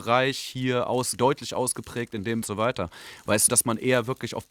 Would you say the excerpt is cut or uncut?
cut